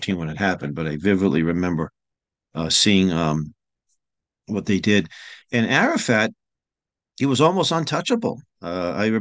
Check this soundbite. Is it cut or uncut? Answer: uncut